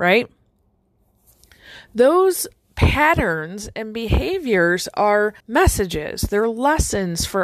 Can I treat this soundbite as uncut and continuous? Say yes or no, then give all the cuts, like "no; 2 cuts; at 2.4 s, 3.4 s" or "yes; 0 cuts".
no; 1 cut; at 5.4 s